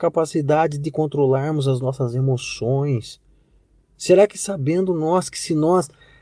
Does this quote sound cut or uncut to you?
uncut